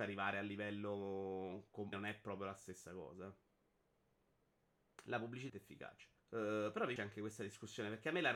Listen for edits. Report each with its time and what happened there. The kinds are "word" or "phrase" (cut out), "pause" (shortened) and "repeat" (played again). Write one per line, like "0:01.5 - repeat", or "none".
0:01.9 - word
0:05.5 - phrase
0:06.2 - pause
0:07.0 - word